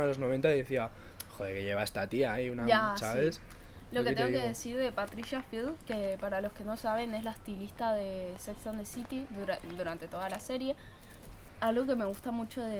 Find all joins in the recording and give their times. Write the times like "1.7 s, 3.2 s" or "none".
none